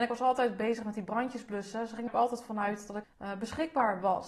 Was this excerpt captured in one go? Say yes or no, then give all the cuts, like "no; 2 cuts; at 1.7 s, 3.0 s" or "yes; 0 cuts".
no; 2 cuts; at 2.1 s, 3.0 s